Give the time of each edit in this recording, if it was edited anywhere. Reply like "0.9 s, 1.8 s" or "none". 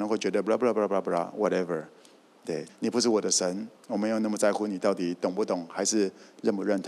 2.7 s, 3.8 s